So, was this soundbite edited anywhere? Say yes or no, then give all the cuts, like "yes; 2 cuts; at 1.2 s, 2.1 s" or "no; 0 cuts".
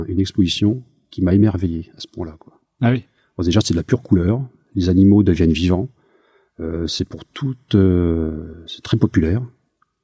no; 0 cuts